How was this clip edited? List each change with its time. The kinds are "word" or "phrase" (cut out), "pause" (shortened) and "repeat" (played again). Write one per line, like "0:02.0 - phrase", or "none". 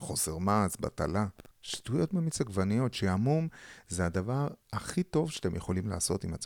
0:01.5 - pause
0:04.6 - pause